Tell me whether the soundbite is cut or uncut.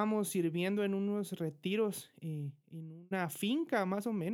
uncut